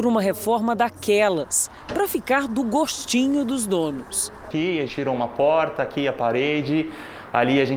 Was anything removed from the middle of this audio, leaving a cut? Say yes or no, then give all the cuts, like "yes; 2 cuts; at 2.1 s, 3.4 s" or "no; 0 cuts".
yes; 1 cut; at 4.9 s